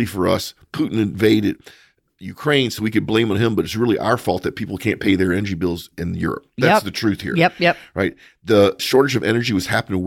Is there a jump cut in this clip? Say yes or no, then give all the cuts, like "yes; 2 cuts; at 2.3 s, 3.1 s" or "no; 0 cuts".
no; 0 cuts